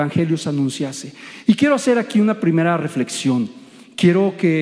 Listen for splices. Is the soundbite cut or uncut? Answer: uncut